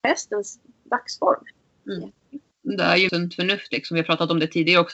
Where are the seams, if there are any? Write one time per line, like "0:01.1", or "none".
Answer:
0:02.4
0:03.1